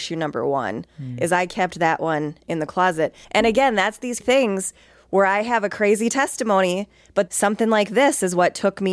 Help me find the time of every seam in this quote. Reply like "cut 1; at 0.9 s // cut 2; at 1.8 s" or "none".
cut 1; at 3.2 s // cut 2; at 4.2 s // cut 3; at 7.3 s